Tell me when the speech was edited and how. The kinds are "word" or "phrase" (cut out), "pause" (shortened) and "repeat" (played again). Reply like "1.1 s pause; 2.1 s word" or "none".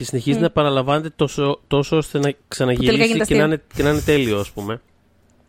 none

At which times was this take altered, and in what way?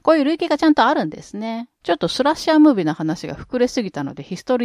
1.7 s pause

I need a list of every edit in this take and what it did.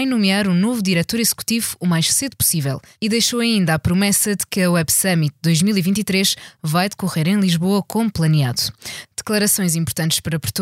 none

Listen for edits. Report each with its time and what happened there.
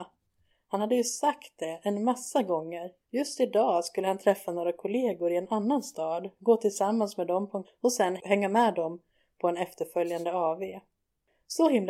3.0 s pause; 7.6 s word

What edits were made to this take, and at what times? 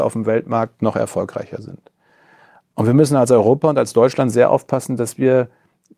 none

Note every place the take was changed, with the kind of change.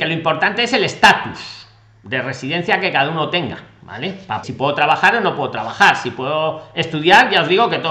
4.4 s word

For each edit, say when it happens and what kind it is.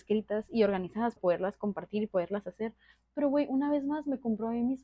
1.2 s word

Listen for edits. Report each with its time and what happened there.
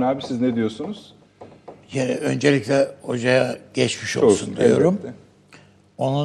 none

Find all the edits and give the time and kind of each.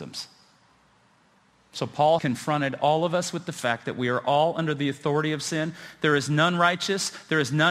2.2 s word

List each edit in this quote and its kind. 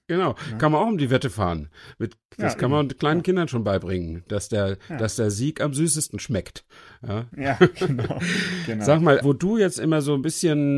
9.2 s word

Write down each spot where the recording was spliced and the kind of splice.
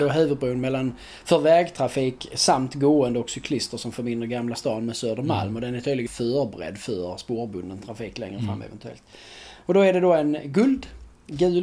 6.1 s word

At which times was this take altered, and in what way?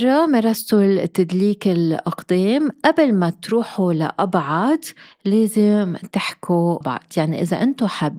6.8 s word

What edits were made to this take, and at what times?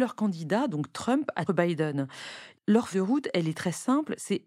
1.5 s phrase; 2.9 s word

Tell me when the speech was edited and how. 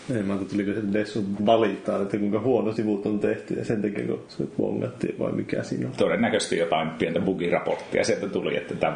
1.4 s word; 2.8 s word

